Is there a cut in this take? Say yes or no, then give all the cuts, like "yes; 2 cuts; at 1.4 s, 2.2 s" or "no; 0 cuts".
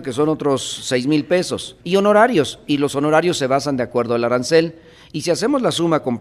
yes; 1 cut; at 1.8 s